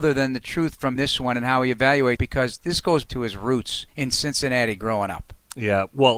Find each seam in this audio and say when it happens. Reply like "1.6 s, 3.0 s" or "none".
1.0 s, 2.2 s, 3.1 s, 3.9 s